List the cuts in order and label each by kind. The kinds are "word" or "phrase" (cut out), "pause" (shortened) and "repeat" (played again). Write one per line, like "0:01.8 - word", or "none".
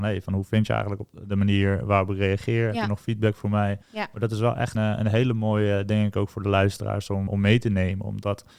0:03.8 - pause
0:04.7 - word
0:07.3 - word